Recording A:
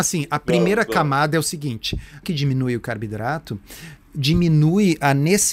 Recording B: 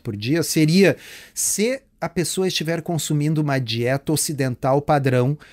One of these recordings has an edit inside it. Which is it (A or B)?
A